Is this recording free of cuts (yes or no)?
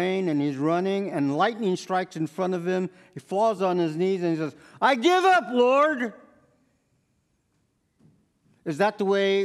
yes